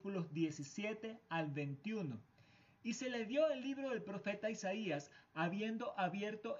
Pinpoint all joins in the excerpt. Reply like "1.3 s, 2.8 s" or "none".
none